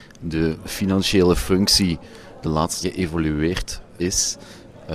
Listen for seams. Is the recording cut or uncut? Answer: cut